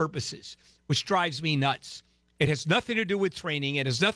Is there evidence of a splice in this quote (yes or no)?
no